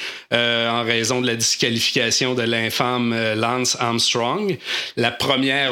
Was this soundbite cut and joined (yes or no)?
no